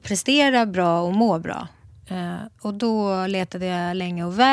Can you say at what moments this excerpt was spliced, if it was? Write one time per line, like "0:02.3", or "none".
none